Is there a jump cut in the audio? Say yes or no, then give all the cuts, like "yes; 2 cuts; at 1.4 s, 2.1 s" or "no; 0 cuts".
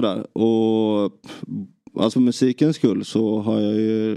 yes; 1 cut; at 2.1 s